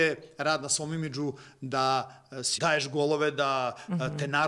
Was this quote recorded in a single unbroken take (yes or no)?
no